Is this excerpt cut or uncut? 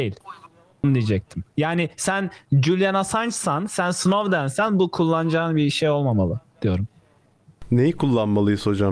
uncut